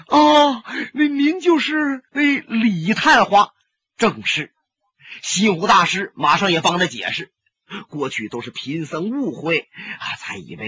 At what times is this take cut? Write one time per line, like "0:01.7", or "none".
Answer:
0:02.1
0:03.9

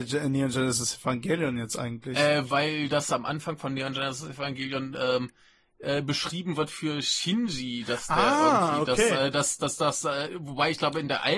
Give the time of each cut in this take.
none

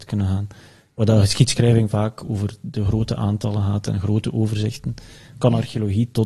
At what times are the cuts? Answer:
none

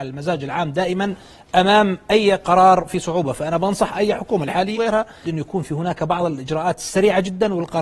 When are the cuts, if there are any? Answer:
0:04.8
0:05.2

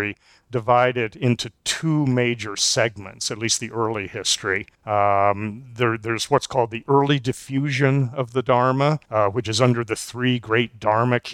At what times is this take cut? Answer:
0:04.7
0:09.0

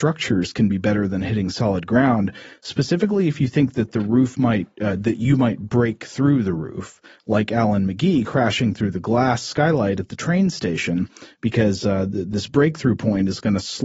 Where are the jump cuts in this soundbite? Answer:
none

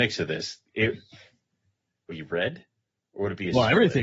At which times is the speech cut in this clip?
0:02.1

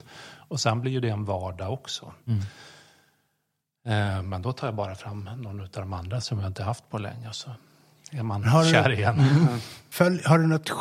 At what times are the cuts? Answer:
none

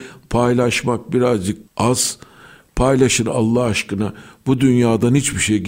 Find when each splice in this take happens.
0:01.6

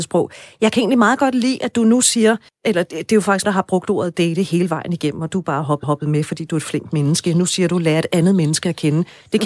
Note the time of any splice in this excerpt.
0:02.5
0:03.4
0:05.8

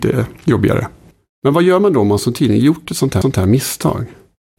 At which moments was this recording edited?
0:03.2

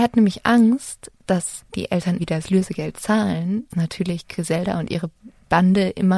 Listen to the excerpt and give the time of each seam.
0:01.7
0:02.2
0:03.7

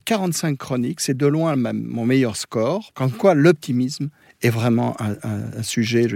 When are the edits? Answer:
none

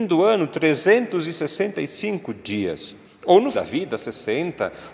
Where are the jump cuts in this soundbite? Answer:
0:03.1
0:03.5

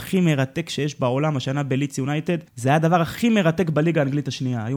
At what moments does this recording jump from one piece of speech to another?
0:02.5

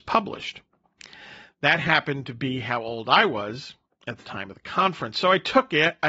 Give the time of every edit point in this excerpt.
none

